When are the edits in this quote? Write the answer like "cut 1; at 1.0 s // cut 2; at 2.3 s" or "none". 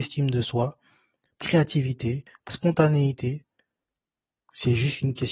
cut 1; at 1.4 s // cut 2; at 2.5 s